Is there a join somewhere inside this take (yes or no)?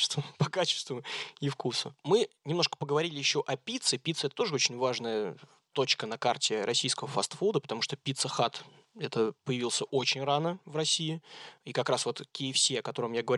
no